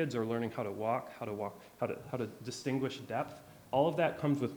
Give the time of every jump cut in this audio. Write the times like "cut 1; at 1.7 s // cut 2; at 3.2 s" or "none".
none